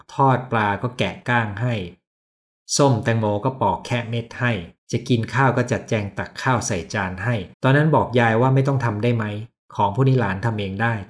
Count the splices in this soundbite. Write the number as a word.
two